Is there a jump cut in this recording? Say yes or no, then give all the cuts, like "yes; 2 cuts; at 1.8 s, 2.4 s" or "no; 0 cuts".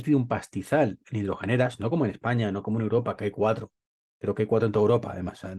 no; 0 cuts